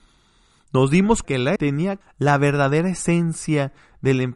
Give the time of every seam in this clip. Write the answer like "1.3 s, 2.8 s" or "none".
1.2 s, 1.6 s, 2.0 s